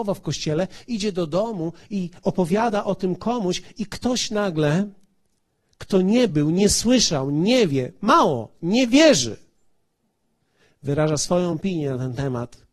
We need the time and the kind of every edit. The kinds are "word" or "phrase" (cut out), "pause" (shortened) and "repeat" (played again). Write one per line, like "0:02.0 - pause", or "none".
none